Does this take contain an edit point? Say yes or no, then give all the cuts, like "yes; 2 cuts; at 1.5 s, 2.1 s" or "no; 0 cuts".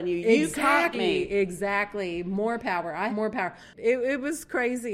yes; 2 cuts; at 0.9 s, 3.1 s